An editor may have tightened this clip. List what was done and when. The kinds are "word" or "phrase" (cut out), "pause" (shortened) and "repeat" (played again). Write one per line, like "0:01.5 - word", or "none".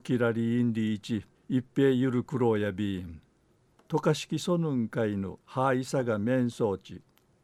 0:01.3 - pause
0:03.4 - pause
0:05.4 - pause